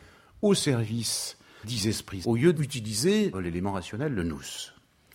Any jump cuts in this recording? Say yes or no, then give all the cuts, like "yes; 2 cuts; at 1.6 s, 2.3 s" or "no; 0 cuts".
yes; 4 cuts; at 1.6 s, 2.2 s, 2.5 s, 3.3 s